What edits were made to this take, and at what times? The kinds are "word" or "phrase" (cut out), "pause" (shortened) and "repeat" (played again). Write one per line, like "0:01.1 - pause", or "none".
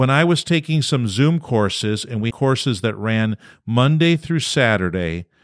0:02.3 - word